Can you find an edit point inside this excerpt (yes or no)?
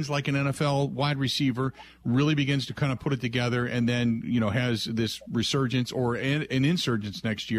no